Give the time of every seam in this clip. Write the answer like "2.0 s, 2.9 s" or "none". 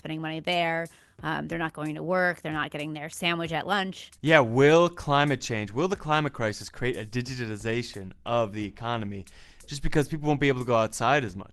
4.2 s